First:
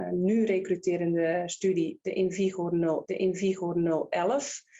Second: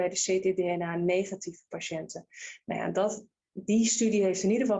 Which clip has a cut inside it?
first; 1 cut; at 3.0 s

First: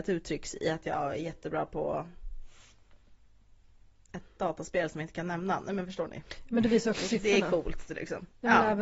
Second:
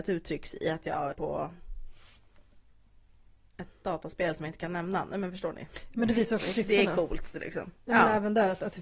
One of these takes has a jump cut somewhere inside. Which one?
second; 1 cut; at 1.1 s

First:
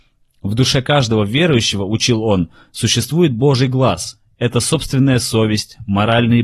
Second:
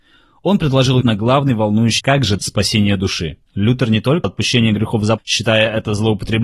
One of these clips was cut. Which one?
second; 6 cuts; at 1.0 s, 2.0 s, 2.4 s, 3.5 s, 4.2 s, 5.2 s

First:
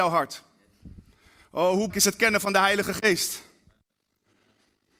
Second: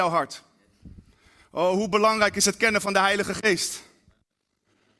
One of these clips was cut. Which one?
first; 1 cut; at 1.9 s

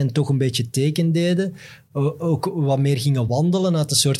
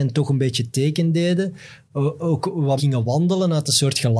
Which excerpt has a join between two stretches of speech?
second; 1 cut; at 2.8 s

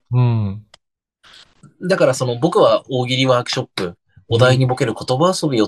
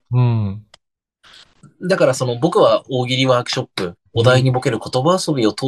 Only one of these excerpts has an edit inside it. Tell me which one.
second; 1 cut; at 4.1 s

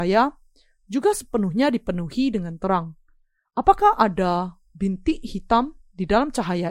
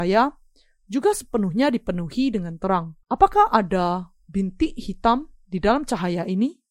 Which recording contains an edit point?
second; 1 cut; at 3.0 s

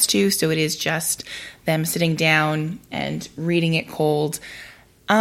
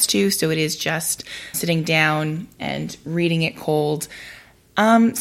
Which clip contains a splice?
second; 1 cut; at 1.5 s

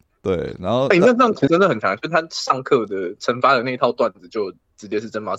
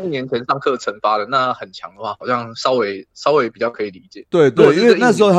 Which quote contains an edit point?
first; 1 cut; at 1.5 s

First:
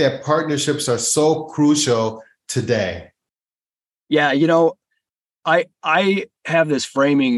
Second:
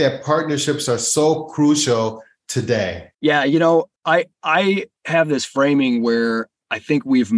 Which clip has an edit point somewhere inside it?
second; 2 cuts; at 3.1 s, 4.0 s

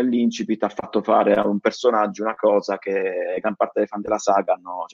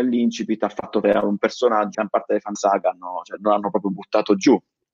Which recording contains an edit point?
second; 4 cuts; at 1.0 s, 1.9 s, 2.5 s, 3.4 s

